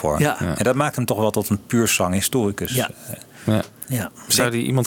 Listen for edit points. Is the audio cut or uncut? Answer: uncut